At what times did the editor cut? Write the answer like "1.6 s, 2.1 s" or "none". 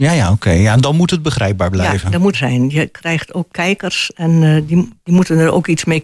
2.3 s, 5.0 s